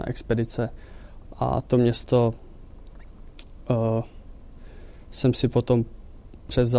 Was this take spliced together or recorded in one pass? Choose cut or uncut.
uncut